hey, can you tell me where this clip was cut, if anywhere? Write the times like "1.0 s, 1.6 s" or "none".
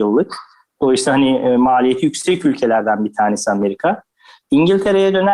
none